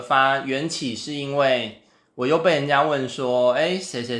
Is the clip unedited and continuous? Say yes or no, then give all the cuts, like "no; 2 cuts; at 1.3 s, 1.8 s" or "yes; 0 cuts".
yes; 0 cuts